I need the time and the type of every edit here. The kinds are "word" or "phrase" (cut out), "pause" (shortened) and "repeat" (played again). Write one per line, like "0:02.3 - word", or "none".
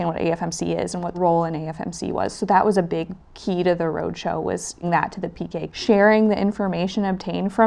0:01.1 - word
0:04.8 - word
0:05.7 - word